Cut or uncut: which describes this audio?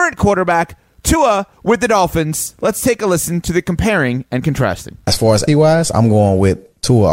cut